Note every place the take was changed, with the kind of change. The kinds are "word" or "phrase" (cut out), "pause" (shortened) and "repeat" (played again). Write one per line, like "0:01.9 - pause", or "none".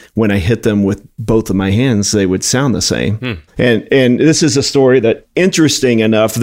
0:03.5 - pause